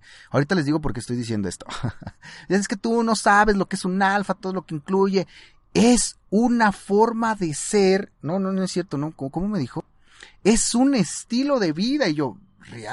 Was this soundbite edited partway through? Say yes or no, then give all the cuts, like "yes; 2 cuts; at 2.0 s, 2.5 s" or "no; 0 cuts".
no; 0 cuts